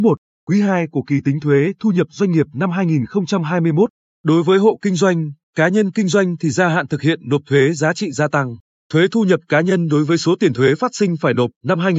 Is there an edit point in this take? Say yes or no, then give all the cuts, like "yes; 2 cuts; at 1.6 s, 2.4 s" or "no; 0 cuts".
no; 0 cuts